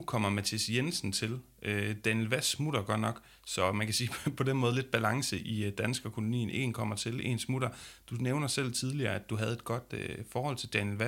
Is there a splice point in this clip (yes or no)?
no